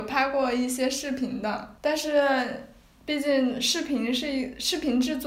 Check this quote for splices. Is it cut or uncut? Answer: uncut